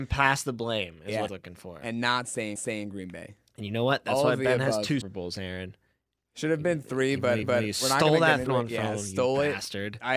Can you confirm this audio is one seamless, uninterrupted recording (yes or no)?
no